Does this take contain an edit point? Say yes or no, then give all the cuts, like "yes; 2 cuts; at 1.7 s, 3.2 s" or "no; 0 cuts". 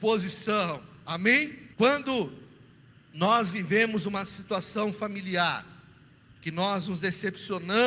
yes; 1 cut; at 1.7 s